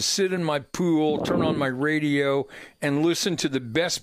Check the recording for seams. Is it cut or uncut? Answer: uncut